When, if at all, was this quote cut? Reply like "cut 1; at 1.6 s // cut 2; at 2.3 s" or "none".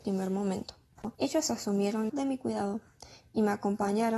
cut 1; at 1.1 s // cut 2; at 2.1 s

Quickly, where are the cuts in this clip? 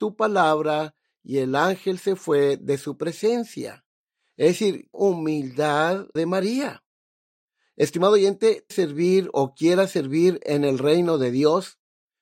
cut 1; at 4.9 s // cut 2; at 6.2 s // cut 3; at 8.7 s

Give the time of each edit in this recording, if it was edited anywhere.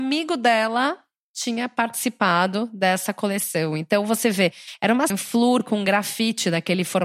cut 1; at 5.1 s

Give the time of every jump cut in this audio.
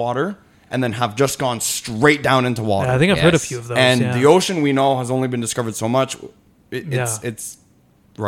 none

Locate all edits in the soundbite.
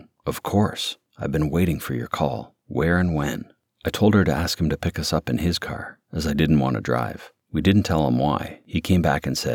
none

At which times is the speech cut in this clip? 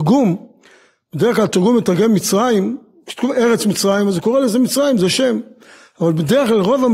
none

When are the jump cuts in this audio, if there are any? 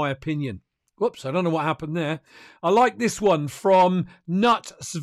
none

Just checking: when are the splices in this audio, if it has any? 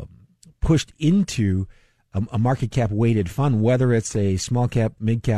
none

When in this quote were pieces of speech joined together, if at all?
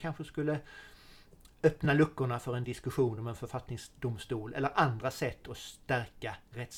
none

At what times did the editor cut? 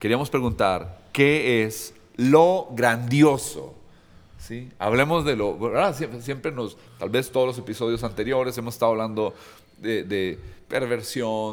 none

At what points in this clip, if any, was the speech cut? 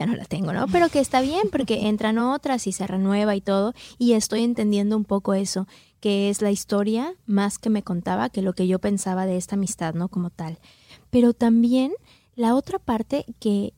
none

